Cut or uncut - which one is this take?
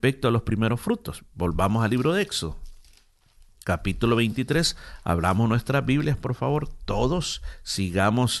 uncut